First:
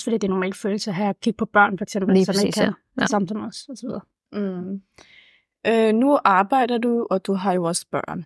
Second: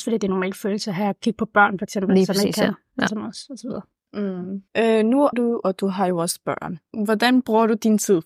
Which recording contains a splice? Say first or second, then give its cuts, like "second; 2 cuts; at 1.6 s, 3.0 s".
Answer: second; 3 cuts; at 3.1 s, 4.7 s, 5.3 s